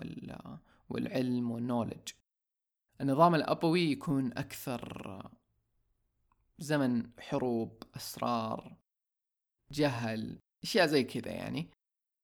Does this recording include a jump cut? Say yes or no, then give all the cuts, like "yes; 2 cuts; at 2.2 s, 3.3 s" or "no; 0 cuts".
no; 0 cuts